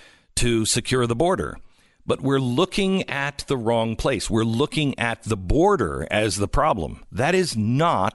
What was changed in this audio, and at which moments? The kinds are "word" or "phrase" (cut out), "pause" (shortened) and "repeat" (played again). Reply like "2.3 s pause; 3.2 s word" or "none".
none